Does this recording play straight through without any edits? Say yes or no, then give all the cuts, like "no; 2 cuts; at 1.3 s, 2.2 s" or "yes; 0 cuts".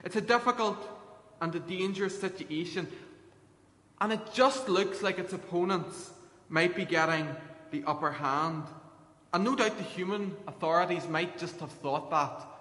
yes; 0 cuts